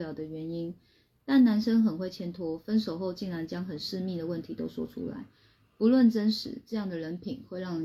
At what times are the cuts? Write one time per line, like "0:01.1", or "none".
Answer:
none